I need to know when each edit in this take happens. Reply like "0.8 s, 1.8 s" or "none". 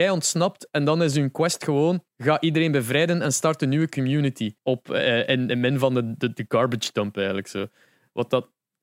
2.1 s, 4.6 s